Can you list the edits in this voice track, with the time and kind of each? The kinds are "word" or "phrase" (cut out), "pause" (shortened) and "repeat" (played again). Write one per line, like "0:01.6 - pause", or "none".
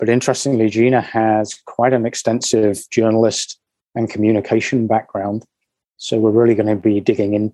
none